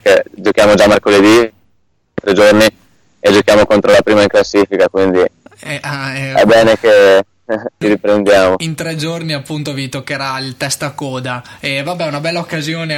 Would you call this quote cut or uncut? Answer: uncut